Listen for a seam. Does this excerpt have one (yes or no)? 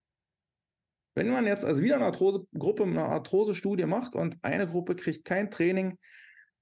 no